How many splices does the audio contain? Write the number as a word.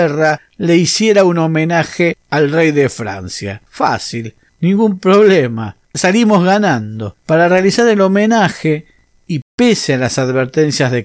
three